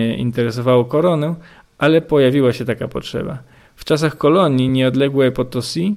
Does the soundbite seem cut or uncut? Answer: uncut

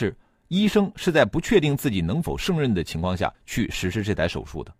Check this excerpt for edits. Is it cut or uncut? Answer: cut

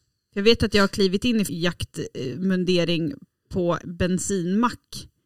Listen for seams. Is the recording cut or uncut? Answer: cut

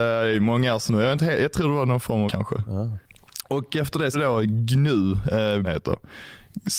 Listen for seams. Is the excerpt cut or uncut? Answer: cut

